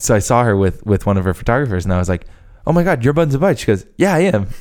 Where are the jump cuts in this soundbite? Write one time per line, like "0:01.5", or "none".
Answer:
none